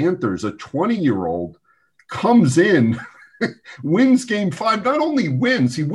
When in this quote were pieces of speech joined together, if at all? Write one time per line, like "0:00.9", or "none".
none